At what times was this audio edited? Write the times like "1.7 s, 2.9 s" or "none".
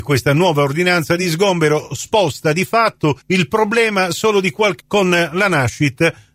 3.2 s, 4.8 s